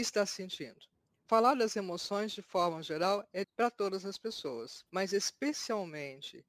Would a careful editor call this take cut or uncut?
cut